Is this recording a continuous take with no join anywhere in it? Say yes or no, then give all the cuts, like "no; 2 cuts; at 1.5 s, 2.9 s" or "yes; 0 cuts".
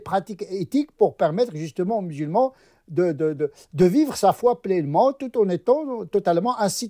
yes; 0 cuts